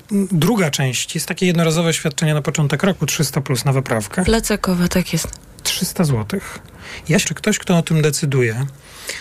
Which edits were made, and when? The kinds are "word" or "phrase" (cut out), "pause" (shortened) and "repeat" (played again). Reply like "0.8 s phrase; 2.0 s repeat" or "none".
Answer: 7.2 s word